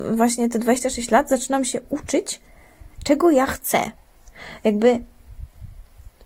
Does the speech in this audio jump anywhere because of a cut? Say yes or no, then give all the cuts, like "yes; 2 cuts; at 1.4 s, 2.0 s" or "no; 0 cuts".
no; 0 cuts